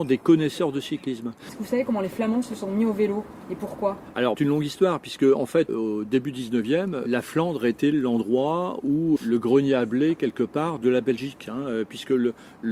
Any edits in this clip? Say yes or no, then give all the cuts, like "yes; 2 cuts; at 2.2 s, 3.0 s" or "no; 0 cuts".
yes; 3 cuts; at 4.3 s, 5.7 s, 9.2 s